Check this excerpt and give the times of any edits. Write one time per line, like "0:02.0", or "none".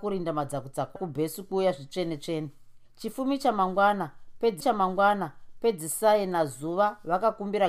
0:01.0
0:02.9
0:04.6